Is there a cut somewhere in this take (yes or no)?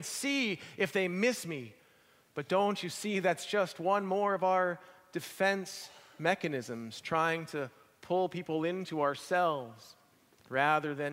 no